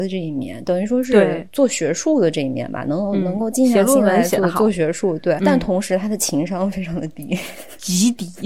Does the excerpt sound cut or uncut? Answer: cut